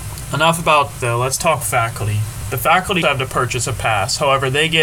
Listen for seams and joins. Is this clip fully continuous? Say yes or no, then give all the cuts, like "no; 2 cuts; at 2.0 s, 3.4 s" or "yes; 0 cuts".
no; 3 cuts; at 1.0 s, 1.6 s, 3.0 s